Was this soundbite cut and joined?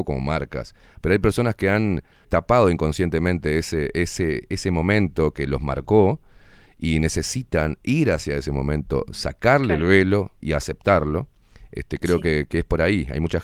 yes; 2 cuts; at 2.2 s, 10.4 s

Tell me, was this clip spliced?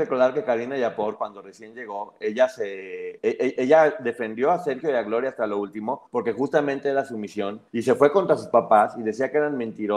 yes; 3 cuts; at 3.2 s, 6.1 s, 7.7 s

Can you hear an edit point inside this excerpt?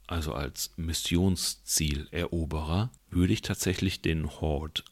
no; 0 cuts

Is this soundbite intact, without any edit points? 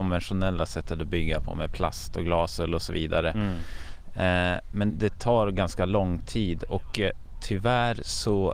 no; 1 cut; at 4.9 s

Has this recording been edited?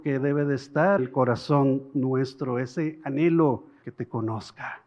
yes; 2 cuts; at 1.0 s, 3.8 s

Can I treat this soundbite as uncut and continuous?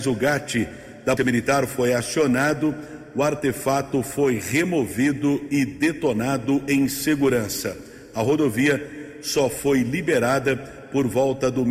no; 1 cut; at 1.2 s

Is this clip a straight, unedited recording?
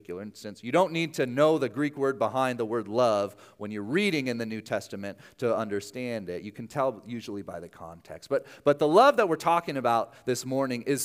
yes; 0 cuts

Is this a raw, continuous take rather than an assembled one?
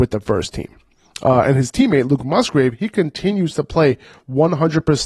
yes; 0 cuts

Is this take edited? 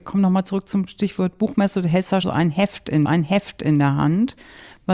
yes; 2 cuts; at 2.2 s, 3.1 s

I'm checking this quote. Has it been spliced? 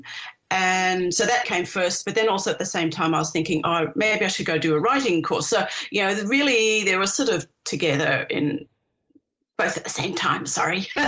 yes; 1 cut; at 1.4 s

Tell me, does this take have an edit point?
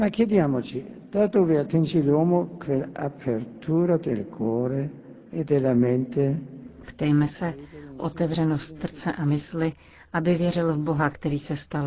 yes; 2 cuts; at 5.3 s, 8.0 s

